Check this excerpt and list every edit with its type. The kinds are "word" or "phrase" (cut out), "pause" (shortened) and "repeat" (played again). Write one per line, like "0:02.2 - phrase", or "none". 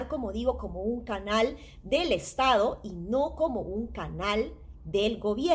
none